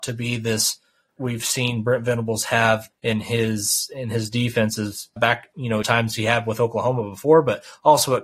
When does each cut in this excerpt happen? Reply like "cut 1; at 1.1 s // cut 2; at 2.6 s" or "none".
cut 1; at 1.2 s // cut 2; at 2.9 s // cut 3; at 5.2 s // cut 4; at 5.8 s

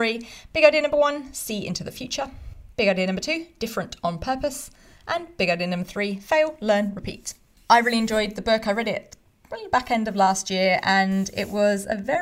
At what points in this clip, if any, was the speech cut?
none

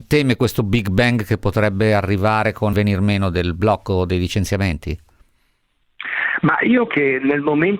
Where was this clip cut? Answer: cut 1; at 2.7 s // cut 2; at 6.9 s

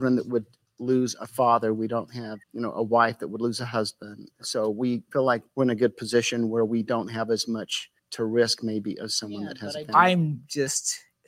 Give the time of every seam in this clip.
cut 1; at 2.4 s // cut 2; at 8.0 s

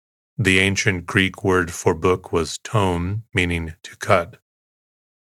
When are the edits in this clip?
none

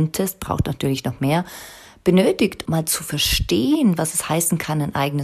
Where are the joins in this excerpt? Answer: cut 1; at 2.6 s

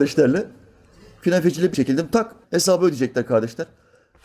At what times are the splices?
cut 1; at 1.7 s // cut 2; at 2.4 s

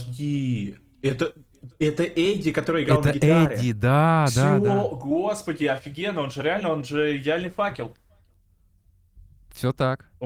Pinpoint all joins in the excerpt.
none

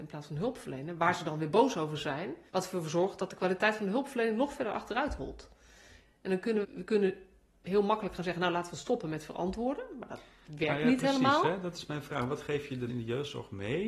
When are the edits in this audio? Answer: cut 1; at 2.5 s // cut 2; at 6.6 s // cut 3; at 12.9 s

